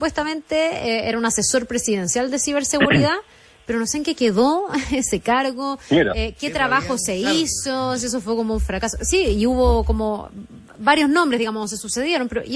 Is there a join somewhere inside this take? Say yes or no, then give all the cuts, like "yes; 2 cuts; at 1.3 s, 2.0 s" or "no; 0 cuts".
no; 0 cuts